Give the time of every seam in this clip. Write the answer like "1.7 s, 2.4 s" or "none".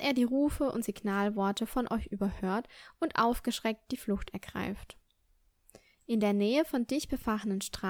none